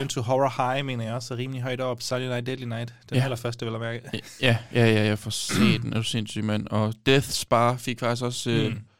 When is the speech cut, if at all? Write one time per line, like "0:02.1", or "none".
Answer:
none

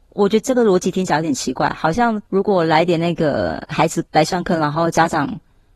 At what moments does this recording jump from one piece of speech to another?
0:02.3
0:04.1

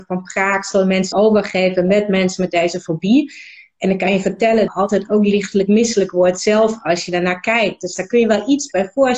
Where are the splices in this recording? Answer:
0:01.1
0:04.7

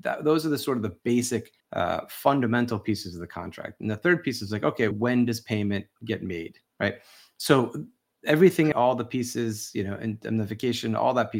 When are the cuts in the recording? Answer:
0:01.6
0:04.9
0:06.7
0:08.7

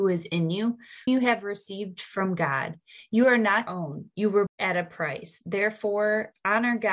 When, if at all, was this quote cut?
0:01.1
0:03.7
0:04.5

